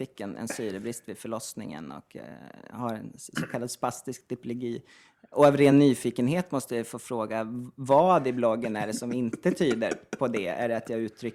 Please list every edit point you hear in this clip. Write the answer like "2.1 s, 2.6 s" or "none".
none